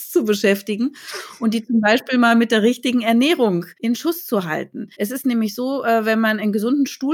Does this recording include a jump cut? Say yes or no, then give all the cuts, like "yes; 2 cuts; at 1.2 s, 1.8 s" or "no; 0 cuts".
yes; 2 cuts; at 3.7 s, 4.9 s